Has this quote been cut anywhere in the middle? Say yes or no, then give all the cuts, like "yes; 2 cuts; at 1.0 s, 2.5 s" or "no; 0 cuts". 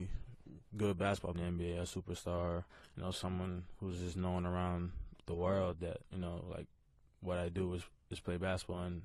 yes; 2 cuts; at 1.3 s, 2.7 s